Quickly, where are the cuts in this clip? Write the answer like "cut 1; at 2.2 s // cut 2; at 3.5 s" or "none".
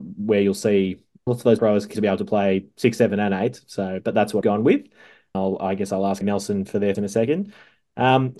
cut 1; at 1.3 s // cut 2; at 1.6 s // cut 3; at 1.9 s // cut 4; at 4.4 s // cut 5; at 5.3 s // cut 6; at 6.2 s // cut 7; at 6.9 s